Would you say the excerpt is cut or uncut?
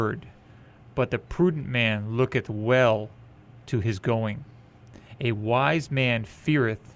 uncut